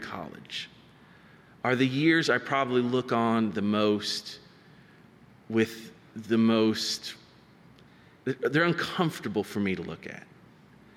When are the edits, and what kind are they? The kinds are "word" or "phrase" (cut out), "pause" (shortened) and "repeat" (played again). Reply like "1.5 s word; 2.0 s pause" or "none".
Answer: none